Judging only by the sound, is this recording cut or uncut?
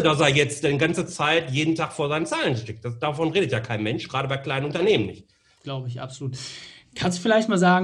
uncut